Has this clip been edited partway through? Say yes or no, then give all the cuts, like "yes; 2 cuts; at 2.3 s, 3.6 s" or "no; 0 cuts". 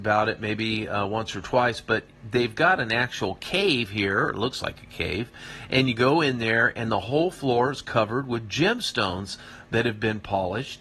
no; 0 cuts